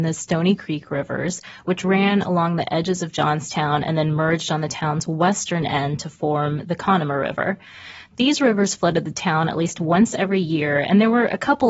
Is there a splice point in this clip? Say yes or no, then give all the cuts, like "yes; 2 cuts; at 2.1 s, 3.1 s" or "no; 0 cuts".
no; 0 cuts